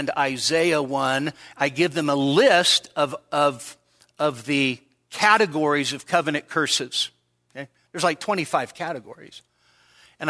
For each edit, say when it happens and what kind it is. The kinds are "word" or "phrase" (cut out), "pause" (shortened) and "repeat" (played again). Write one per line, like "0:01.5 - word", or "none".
none

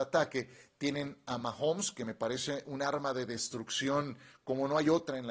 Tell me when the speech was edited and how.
none

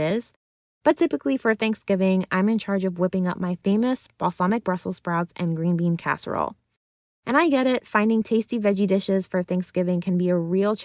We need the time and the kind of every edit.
none

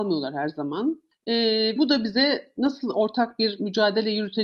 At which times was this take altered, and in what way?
0:01.8 - word

